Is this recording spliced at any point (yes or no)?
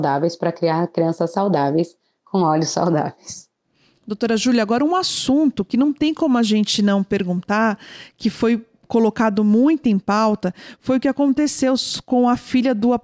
no